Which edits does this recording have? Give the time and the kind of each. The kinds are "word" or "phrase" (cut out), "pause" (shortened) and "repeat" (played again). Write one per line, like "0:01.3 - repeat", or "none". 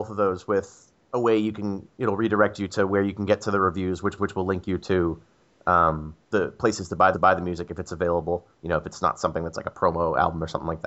0:04.2 - repeat
0:06.2 - pause
0:07.1 - repeat